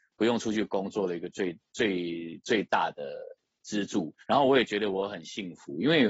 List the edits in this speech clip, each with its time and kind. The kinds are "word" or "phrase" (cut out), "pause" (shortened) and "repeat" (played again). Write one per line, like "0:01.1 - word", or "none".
0:04.2 - pause